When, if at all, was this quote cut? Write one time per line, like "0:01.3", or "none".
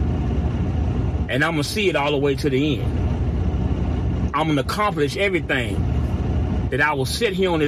none